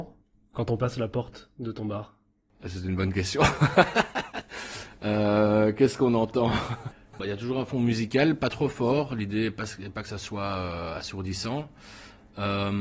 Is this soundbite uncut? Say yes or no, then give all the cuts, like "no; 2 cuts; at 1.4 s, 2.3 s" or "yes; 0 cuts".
yes; 0 cuts